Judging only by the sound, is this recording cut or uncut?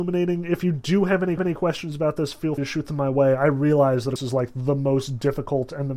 cut